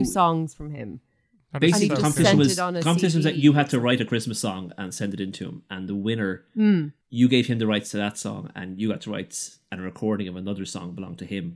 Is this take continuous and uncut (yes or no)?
no